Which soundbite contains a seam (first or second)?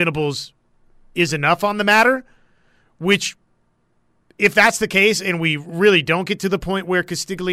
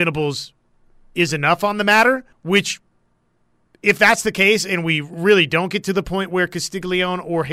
second